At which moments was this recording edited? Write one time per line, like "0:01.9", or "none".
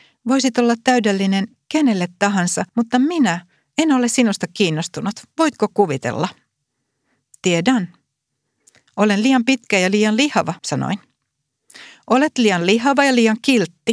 0:02.7
0:10.6